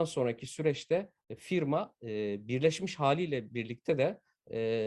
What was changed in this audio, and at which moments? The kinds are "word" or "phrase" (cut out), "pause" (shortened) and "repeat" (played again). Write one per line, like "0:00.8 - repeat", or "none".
0:01.2 - pause